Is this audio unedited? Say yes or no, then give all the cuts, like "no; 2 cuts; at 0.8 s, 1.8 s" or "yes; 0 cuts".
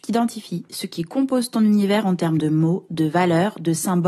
yes; 0 cuts